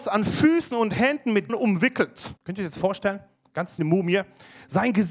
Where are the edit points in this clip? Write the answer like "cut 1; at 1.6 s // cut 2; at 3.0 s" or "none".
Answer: cut 1; at 1.5 s // cut 2; at 2.4 s // cut 3; at 3.8 s